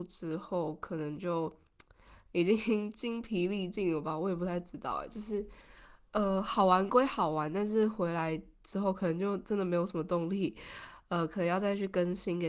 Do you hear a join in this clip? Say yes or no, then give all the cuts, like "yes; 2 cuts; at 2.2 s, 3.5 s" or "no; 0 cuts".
no; 0 cuts